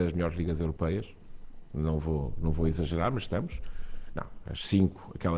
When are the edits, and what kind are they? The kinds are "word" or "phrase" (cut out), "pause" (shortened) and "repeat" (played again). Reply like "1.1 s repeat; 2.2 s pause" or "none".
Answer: none